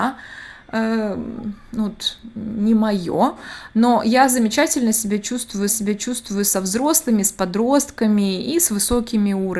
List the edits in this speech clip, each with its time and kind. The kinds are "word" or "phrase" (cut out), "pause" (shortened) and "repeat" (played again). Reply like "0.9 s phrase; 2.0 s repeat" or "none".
5.7 s repeat